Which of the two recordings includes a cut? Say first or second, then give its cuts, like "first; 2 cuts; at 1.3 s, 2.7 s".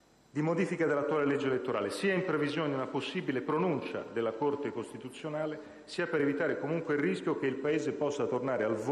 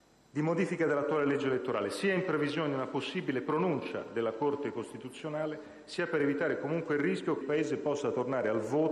second; 1 cut; at 7.4 s